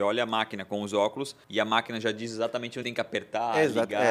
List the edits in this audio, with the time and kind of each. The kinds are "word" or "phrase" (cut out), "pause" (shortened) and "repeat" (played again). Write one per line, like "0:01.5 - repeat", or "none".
0:01.4 - pause
0:02.8 - word